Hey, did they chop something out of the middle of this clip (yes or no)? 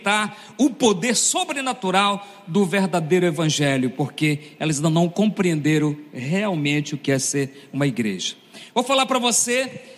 no